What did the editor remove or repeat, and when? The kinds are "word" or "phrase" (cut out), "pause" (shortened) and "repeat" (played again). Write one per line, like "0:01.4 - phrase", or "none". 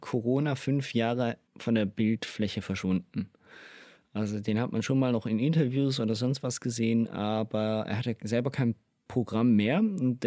0:01.5 - pause